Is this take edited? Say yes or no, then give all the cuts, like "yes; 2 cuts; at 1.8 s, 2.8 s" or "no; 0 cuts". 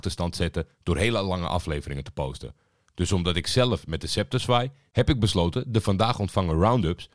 no; 0 cuts